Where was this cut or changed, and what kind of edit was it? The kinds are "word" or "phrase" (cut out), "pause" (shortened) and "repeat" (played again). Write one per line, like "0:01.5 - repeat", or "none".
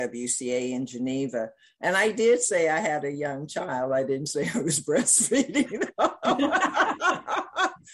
none